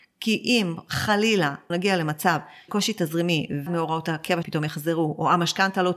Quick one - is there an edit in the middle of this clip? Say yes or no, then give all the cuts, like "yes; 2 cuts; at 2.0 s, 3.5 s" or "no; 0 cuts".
yes; 4 cuts; at 1.7 s, 2.7 s, 3.7 s, 4.4 s